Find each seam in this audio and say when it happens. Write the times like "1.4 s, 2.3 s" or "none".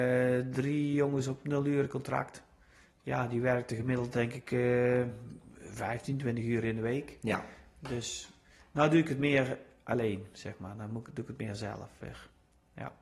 none

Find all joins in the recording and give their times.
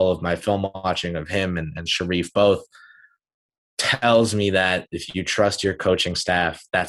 none

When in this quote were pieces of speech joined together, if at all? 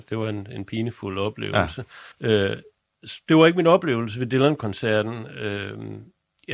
2.1 s

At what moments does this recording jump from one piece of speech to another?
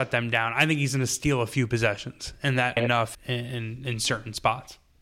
2.8 s, 3.1 s

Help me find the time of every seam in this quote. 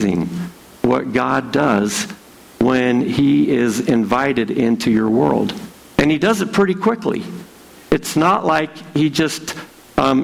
5.9 s

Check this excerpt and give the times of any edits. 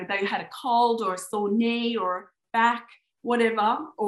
none

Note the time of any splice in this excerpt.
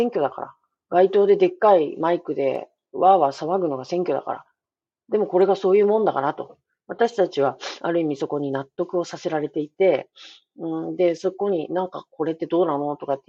none

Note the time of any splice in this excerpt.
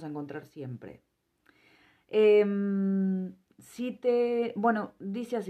none

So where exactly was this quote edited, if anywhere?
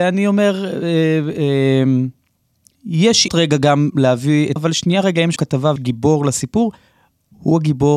3.3 s, 4.6 s, 5.4 s, 5.8 s

